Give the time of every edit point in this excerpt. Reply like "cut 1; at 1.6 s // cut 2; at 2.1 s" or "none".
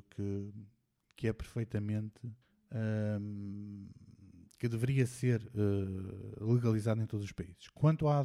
cut 1; at 2.4 s